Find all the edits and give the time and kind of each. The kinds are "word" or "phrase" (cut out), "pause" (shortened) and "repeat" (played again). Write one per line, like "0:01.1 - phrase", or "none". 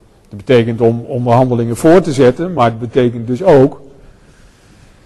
none